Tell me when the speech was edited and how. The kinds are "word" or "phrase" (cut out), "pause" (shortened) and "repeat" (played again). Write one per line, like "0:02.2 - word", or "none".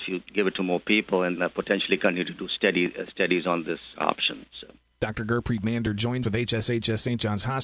0:01.4 - word
0:03.9 - word
0:04.8 - pause
0:06.2 - word